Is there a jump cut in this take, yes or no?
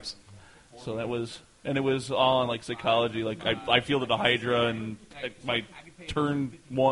no